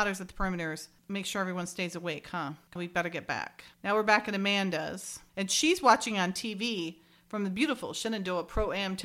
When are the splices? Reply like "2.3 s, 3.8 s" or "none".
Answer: 2.8 s